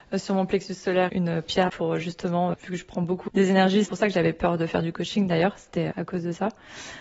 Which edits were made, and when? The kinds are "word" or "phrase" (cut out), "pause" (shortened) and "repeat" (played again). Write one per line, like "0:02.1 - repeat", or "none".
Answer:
0:01.1 - word
0:01.7 - word
0:02.5 - word
0:03.3 - word
0:03.9 - word
0:05.9 - word

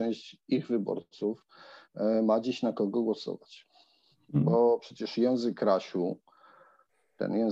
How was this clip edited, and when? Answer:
none

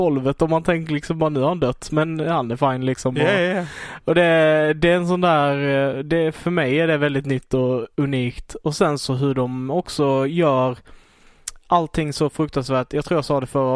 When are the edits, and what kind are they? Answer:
none

